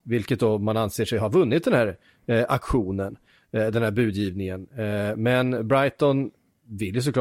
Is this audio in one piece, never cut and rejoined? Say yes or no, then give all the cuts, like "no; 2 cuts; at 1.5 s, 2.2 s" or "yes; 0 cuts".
yes; 0 cuts